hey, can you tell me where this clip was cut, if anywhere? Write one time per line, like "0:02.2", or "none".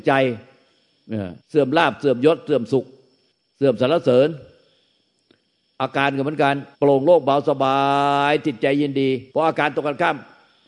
0:01.4
0:03.3
0:06.7
0:09.3

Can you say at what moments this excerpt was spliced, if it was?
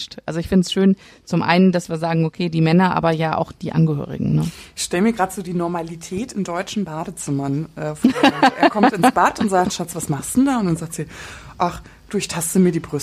none

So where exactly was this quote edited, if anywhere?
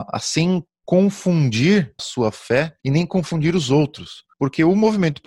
0:02.0
0:02.8
0:04.3

